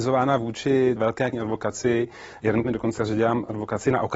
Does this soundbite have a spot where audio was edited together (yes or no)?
yes